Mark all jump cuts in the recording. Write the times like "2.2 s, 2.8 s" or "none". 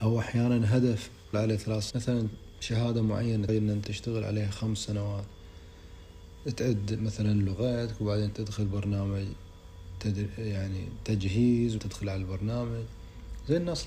1.3 s, 1.9 s, 3.5 s, 3.8 s, 8.3 s, 11.8 s